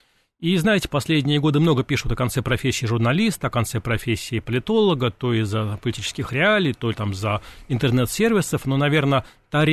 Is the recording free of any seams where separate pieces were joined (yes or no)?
yes